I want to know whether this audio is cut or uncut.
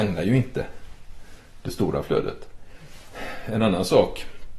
uncut